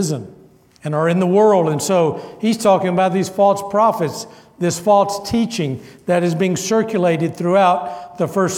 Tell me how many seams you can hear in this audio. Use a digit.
0